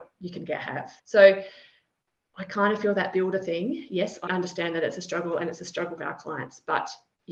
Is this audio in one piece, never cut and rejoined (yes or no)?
no